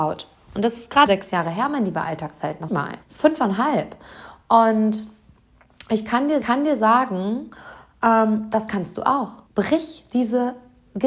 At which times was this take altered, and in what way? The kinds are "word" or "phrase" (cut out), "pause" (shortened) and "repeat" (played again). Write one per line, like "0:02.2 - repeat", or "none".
0:01.1 - word
0:02.7 - word
0:03.0 - pause
0:06.4 - repeat
0:09.5 - pause